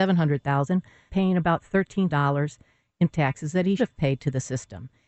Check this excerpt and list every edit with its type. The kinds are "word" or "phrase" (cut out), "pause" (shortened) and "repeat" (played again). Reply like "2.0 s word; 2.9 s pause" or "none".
1.1 s word; 2.1 s word; 3.1 s word; 3.8 s word